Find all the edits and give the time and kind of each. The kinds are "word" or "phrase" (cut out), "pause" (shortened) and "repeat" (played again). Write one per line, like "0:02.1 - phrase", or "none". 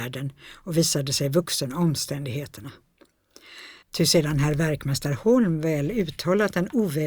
0:03.8 - pause